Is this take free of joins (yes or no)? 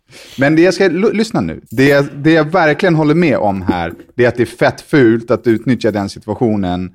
no